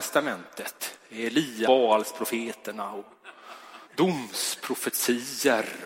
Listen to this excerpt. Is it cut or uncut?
cut